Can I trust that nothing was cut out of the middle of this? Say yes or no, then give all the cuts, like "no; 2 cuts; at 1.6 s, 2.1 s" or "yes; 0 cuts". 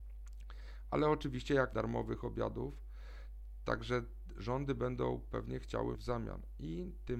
no; 2 cuts; at 1.7 s, 5.9 s